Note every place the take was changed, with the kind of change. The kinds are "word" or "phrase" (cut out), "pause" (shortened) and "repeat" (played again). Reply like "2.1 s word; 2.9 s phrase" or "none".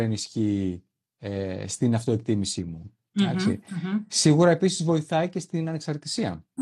none